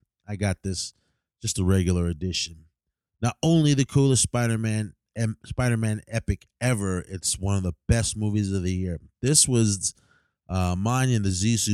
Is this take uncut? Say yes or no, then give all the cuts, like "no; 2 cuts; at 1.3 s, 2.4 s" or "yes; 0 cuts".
yes; 0 cuts